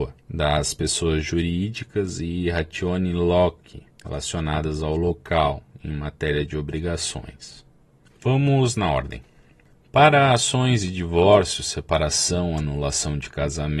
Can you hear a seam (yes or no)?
no